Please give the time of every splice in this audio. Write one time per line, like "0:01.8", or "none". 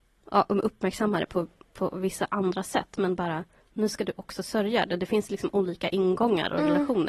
none